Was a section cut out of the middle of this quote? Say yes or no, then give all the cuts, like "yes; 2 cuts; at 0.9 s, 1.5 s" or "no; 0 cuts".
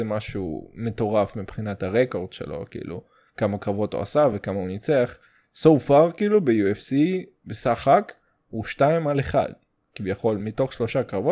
no; 0 cuts